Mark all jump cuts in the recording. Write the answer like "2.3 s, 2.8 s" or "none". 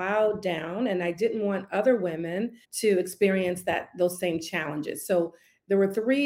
2.6 s